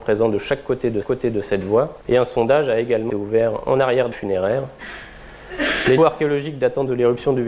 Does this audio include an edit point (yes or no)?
yes